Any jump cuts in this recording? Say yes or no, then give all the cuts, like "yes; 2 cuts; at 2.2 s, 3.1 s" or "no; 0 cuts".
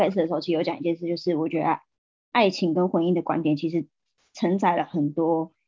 no; 0 cuts